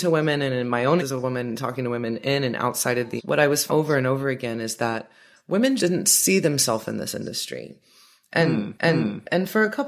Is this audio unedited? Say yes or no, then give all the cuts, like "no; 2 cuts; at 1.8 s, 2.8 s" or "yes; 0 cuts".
no; 5 cuts; at 1.0 s, 3.2 s, 3.7 s, 5.8 s, 8.7 s